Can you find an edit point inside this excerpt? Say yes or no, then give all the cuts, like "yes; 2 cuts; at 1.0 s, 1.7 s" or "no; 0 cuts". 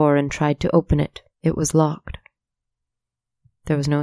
yes; 1 cut; at 1.3 s